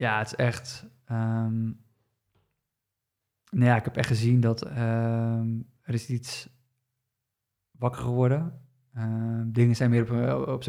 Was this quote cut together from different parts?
no; 0 cuts

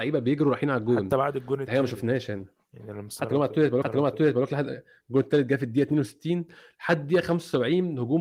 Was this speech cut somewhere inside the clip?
yes; 1 cut; at 3.8 s

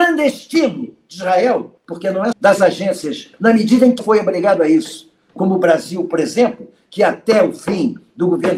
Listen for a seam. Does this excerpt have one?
yes; 4 cuts; at 1.8 s, 2.3 s, 3.3 s, 4.0 s

